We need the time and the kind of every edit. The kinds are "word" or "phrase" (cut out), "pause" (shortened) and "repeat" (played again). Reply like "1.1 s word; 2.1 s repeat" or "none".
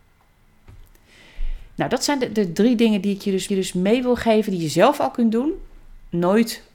3.5 s repeat